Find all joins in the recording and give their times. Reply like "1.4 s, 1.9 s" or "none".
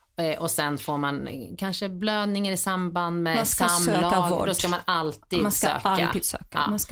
none